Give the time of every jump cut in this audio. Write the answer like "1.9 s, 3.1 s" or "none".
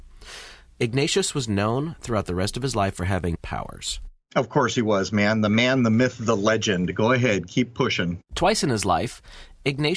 3.3 s, 8.2 s